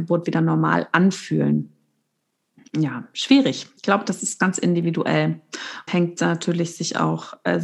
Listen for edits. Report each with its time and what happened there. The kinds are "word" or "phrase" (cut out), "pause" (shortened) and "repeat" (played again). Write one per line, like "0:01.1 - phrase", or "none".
0:03.8 - pause
0:05.9 - word